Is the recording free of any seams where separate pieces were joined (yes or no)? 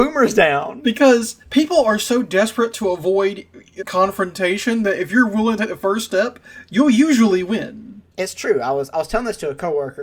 no